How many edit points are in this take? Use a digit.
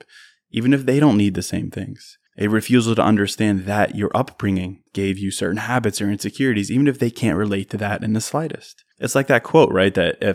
3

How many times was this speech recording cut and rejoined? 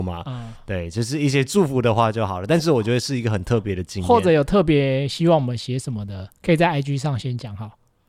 0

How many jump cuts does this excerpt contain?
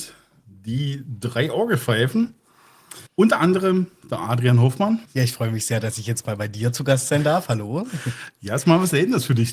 2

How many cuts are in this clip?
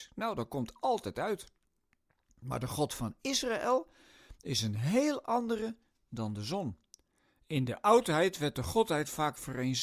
0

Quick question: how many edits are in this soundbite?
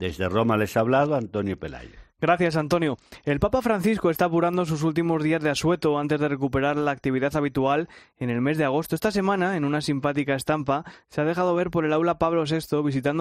0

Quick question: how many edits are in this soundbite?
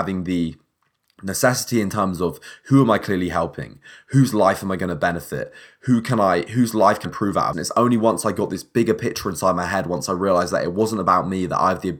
2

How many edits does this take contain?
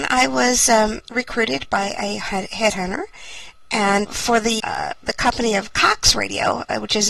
2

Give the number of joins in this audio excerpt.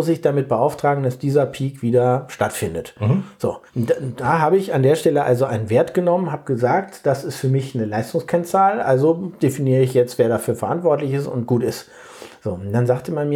1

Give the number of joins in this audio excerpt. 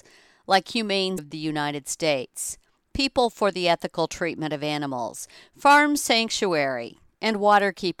1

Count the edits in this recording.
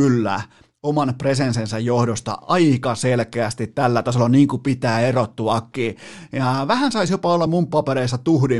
0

